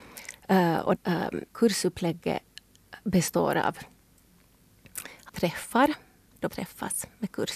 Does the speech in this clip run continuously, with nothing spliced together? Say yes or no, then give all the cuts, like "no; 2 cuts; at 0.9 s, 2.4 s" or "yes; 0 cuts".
no; 4 cuts; at 1.0 s, 1.5 s, 5.3 s, 6.5 s